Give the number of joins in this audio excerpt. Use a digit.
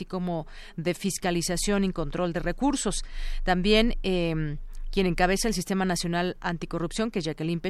0